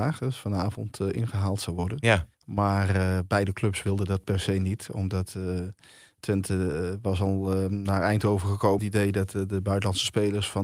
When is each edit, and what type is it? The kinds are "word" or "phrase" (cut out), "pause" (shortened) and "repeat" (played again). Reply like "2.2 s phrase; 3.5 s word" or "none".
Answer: 2.3 s pause; 8.8 s phrase